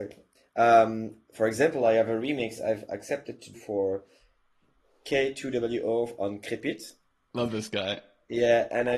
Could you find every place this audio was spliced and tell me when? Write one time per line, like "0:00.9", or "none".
0:03.5